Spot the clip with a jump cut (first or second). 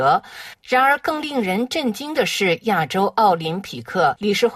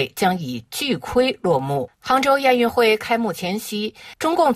second